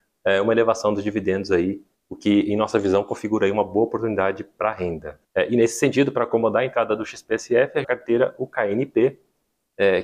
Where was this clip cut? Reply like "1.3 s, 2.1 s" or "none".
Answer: 1.9 s, 5.2 s, 7.8 s